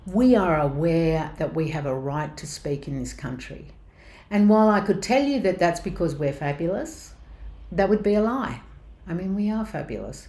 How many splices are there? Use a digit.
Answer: 0